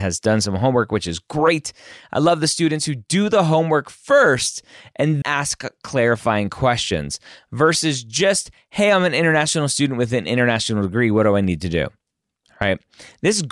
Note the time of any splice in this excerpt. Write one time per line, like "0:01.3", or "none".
0:05.2